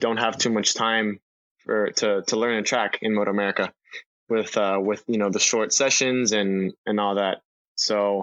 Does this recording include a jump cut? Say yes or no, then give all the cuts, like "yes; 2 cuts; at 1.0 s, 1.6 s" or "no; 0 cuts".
no; 0 cuts